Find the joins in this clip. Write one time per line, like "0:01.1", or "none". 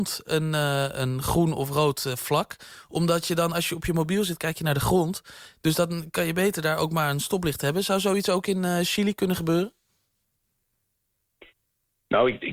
none